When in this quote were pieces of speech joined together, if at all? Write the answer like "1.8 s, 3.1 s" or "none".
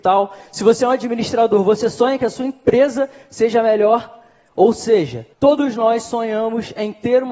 5.3 s

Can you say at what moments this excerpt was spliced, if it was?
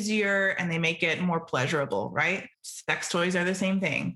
2.5 s

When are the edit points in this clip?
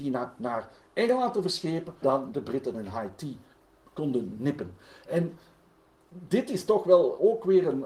2.0 s, 2.3 s, 2.7 s

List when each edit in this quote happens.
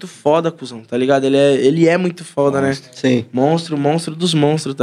none

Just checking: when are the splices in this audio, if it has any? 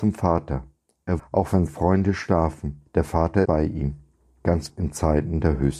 1.2 s, 1.7 s, 2.9 s, 3.4 s, 4.7 s

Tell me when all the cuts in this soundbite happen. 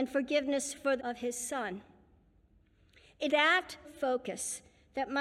1.0 s, 3.3 s, 3.8 s

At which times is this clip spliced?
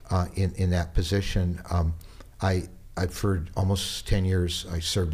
none

